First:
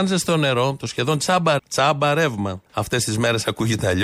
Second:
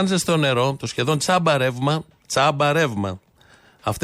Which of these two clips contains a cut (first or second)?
first